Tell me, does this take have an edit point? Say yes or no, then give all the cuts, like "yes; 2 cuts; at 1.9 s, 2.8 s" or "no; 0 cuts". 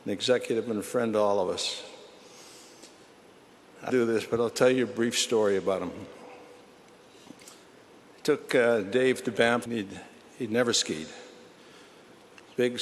yes; 2 cuts; at 3.9 s, 9.7 s